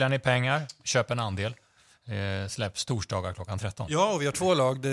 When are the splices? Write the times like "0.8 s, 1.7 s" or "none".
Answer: none